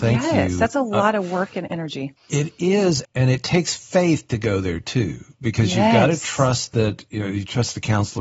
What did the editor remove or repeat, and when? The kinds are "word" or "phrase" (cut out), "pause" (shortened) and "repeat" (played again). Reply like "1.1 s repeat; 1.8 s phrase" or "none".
2.2 s pause; 3.0 s word